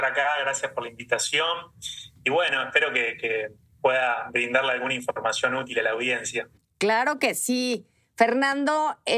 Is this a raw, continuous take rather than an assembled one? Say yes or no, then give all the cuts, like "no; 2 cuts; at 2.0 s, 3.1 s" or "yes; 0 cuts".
yes; 0 cuts